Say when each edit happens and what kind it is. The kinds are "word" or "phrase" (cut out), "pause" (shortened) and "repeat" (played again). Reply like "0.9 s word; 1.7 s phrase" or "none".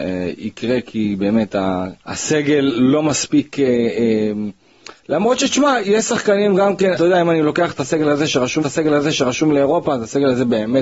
2.0 s pause; 6.9 s word; 8.6 s repeat